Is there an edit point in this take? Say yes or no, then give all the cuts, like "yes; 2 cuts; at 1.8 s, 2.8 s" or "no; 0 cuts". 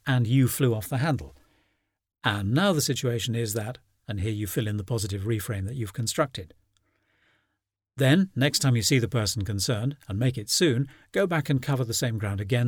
no; 0 cuts